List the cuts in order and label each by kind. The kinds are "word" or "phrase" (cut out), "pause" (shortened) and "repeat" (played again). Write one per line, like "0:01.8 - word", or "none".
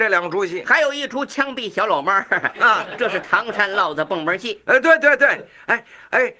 none